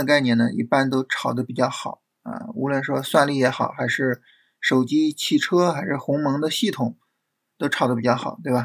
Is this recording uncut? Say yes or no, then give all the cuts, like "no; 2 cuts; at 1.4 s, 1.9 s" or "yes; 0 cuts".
yes; 0 cuts